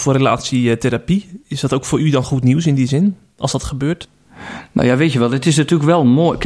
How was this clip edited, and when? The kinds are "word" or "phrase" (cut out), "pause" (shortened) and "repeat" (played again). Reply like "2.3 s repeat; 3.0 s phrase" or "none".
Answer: none

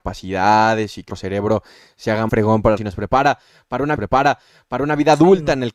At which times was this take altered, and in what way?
1.1 s word; 2.3 s word; 2.8 s phrase; 4.0 s repeat

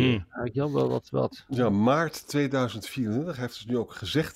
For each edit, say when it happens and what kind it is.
none

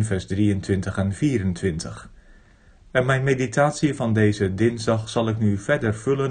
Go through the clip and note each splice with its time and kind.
none

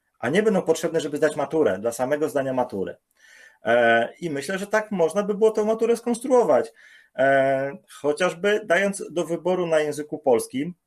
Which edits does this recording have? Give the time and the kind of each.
7.8 s pause

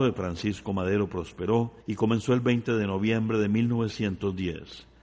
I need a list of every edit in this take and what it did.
1.8 s pause

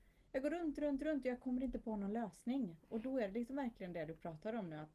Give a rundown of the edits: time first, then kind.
none

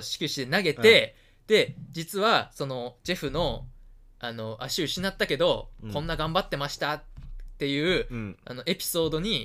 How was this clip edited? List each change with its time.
none

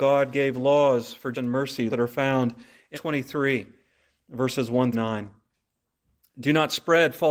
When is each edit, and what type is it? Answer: 1.3 s word; 1.9 s word; 2.9 s word; 4.9 s word

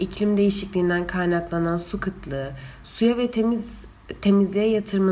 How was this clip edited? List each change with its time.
none

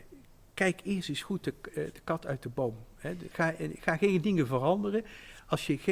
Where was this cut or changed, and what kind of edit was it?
3.3 s word

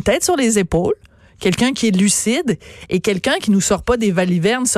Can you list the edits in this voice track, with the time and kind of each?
none

